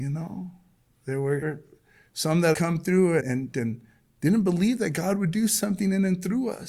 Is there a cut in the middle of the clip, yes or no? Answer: yes